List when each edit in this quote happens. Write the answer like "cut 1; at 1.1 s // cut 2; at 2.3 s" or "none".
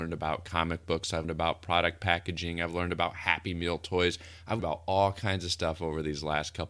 cut 1; at 1.2 s // cut 2; at 4.6 s

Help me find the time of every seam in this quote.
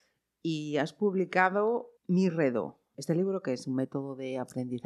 cut 1; at 2.0 s

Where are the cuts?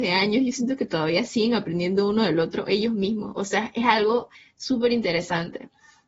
cut 1; at 4.3 s

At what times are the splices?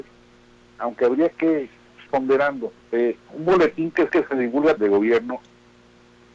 cut 1; at 2.1 s // cut 2; at 2.8 s // cut 3; at 4.1 s // cut 4; at 4.8 s

